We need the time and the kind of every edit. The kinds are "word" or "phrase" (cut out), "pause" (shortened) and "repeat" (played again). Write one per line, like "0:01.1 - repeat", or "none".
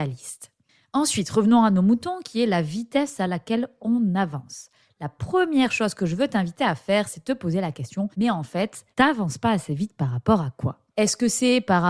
0:08.1 - pause
0:08.9 - pause
0:10.9 - pause